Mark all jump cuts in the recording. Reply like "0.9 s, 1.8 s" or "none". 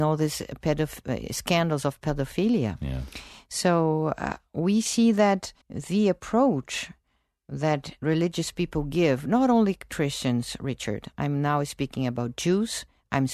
5.6 s